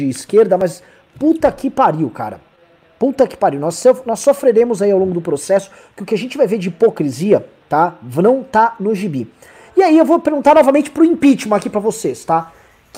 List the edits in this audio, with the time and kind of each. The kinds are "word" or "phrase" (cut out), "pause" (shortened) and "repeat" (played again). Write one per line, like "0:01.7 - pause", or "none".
none